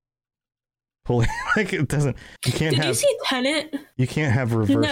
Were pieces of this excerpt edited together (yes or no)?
yes